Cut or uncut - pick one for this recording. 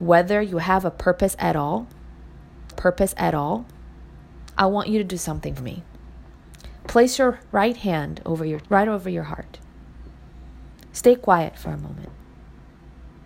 cut